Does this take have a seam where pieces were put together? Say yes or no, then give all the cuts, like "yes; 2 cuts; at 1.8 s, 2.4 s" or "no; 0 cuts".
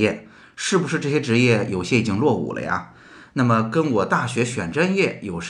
no; 0 cuts